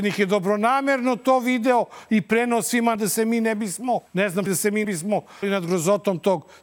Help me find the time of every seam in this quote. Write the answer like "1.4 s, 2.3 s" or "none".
3.0 s, 4.1 s, 4.5 s, 4.8 s, 5.4 s